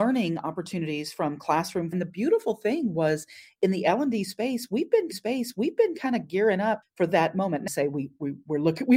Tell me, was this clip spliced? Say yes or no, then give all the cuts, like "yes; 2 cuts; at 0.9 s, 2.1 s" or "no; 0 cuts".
yes; 4 cuts; at 1.9 s, 5.1 s, 6.8 s, 7.7 s